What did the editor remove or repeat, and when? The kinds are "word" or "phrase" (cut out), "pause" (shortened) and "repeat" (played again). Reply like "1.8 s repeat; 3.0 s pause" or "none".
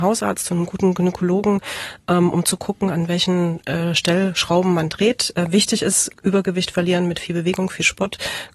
none